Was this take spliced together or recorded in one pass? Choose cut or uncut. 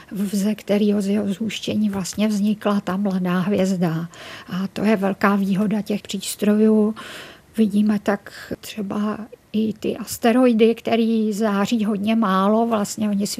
cut